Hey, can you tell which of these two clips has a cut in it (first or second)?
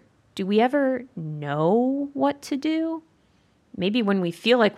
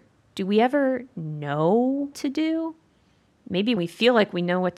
second